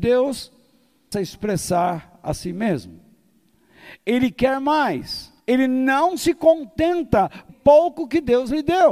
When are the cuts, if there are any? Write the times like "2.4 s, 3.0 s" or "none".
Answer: 1.1 s, 5.4 s, 7.5 s